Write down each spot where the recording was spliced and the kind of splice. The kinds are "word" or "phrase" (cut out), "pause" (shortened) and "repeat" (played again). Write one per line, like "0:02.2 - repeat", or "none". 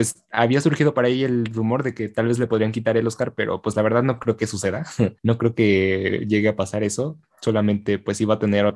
0:05.2 - pause